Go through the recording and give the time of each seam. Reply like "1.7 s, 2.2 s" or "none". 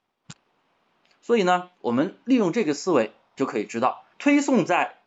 1.7 s, 4.1 s